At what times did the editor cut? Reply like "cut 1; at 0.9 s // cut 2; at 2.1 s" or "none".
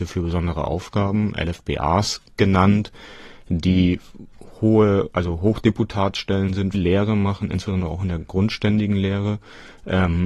cut 1; at 6.7 s